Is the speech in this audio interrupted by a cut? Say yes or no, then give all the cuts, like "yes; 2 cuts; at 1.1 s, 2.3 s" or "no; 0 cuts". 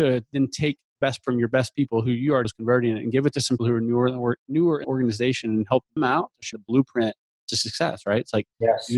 yes; 6 cuts; at 1.2 s, 2.4 s, 3.6 s, 4.8 s, 6.0 s, 6.5 s